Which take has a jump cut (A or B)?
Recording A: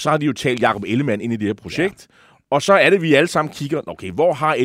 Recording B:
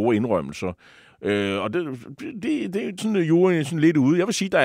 B